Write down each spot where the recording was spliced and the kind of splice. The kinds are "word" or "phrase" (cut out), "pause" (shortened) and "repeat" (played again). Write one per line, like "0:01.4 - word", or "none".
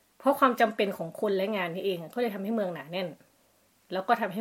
none